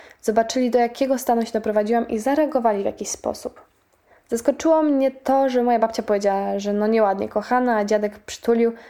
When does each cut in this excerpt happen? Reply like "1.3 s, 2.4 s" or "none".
none